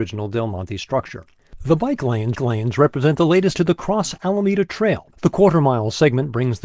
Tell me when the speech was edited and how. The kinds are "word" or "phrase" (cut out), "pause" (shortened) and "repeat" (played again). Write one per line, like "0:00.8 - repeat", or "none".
0:02.3 - repeat
0:03.5 - word
0:05.1 - pause